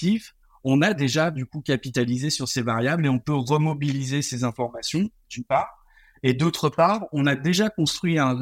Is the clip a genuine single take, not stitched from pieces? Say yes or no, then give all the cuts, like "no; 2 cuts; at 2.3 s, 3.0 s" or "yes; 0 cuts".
yes; 0 cuts